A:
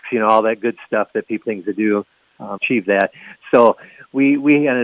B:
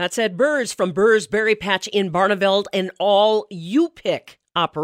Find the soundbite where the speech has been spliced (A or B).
A